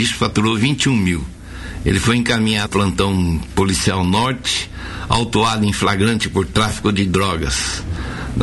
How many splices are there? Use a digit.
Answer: 1